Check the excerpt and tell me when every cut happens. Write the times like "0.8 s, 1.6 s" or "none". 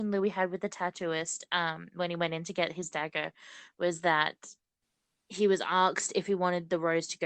none